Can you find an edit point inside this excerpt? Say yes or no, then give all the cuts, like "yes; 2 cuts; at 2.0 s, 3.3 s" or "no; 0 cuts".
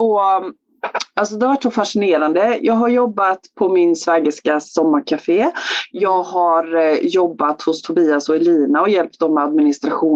no; 0 cuts